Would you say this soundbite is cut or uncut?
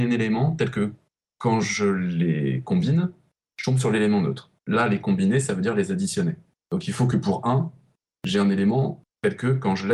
uncut